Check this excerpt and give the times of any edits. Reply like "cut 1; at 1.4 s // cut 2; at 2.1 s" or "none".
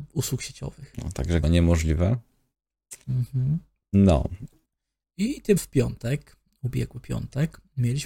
cut 1; at 1.4 s // cut 2; at 4.6 s // cut 3; at 5.6 s